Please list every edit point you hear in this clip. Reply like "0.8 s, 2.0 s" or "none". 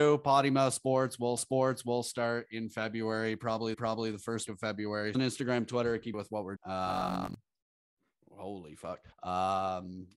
1.4 s, 3.7 s, 4.5 s, 5.1 s, 6.1 s, 6.6 s, 9.1 s